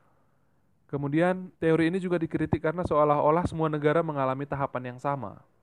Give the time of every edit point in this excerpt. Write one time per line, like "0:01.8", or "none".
0:01.6